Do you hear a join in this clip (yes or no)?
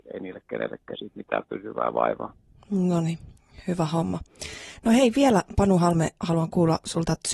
yes